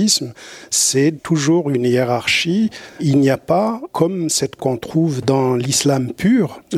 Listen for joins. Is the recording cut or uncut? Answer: cut